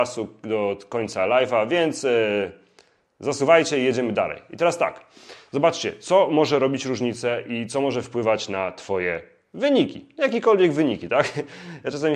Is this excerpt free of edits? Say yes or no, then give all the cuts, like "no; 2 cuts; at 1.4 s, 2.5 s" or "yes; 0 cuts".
yes; 0 cuts